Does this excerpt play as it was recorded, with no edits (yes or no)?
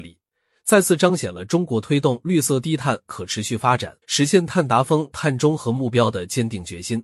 no